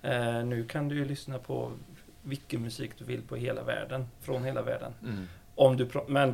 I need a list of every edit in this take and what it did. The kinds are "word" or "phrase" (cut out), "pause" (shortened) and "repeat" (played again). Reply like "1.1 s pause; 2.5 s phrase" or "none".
none